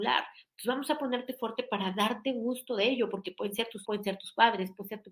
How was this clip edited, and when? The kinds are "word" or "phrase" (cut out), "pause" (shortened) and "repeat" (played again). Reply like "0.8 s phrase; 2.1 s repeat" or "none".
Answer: 3.8 s word